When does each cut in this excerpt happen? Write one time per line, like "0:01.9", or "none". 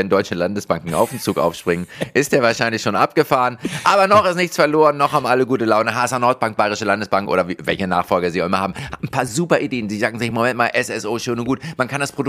none